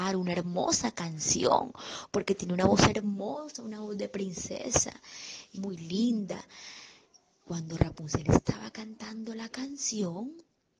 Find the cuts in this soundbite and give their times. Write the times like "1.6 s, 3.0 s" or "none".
5.6 s

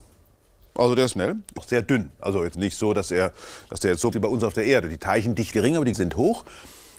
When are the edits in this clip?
1.1 s, 1.6 s, 2.5 s, 4.1 s, 5.5 s, 5.9 s

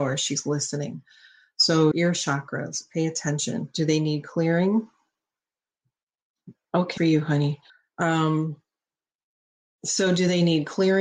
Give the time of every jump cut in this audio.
1.9 s, 7.0 s, 7.7 s

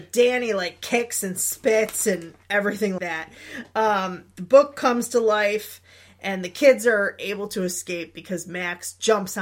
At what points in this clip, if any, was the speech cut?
3.0 s

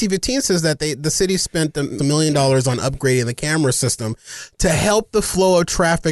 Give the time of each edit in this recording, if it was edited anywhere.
2.0 s

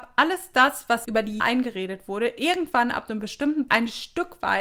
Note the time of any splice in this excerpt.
1.0 s, 1.4 s, 3.7 s

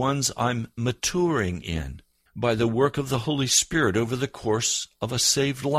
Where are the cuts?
2.3 s

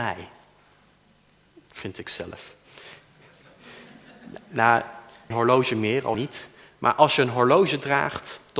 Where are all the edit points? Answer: 5.3 s, 6.1 s

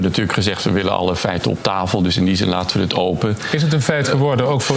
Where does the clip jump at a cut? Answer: none

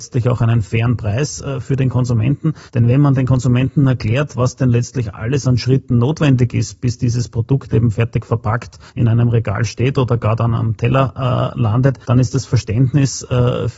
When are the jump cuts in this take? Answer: 2.7 s, 8.9 s, 12.0 s

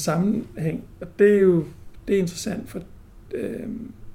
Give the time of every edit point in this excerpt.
none

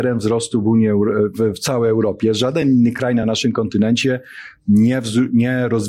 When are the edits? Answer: none

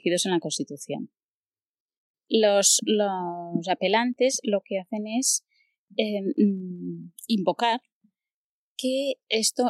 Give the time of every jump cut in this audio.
none

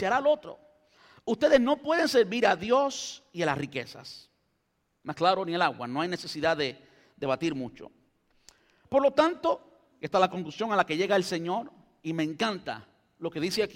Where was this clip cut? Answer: none

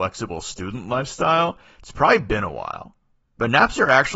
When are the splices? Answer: none

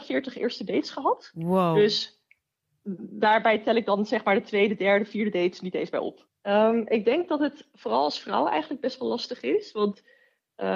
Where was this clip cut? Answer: none

